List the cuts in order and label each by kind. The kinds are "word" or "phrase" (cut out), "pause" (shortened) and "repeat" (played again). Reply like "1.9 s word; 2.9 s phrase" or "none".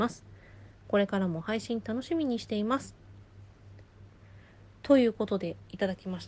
none